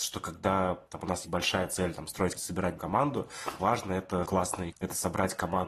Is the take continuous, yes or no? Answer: no